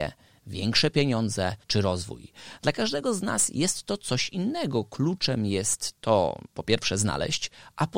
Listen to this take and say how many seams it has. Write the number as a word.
two